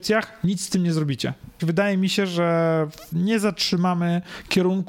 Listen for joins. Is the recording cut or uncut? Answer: cut